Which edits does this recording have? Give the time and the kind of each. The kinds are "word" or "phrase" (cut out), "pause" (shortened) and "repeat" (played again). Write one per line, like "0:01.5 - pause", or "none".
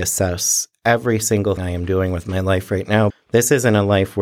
0:01.6 - word
0:03.1 - word

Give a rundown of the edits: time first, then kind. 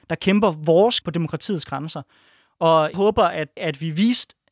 0:01.0 - word
0:02.9 - word
0:03.6 - word

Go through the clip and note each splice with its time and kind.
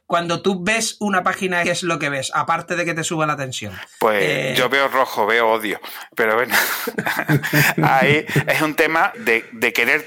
0:01.6 - phrase
0:09.1 - word

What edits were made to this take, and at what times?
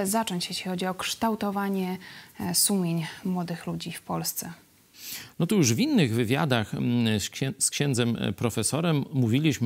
none

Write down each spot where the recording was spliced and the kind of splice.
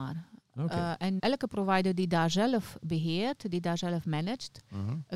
0:01.2 - word

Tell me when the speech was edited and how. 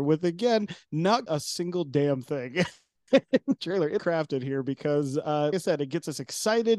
0:01.3 - word
0:03.6 - word
0:04.0 - phrase
0:05.5 - word

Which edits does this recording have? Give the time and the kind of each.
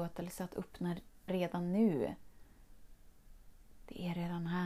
0:01.3 - word

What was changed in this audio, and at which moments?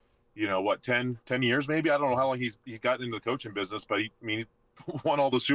0:01.2 - pause

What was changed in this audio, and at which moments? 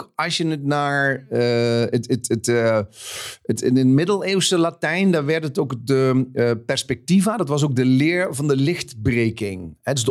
none

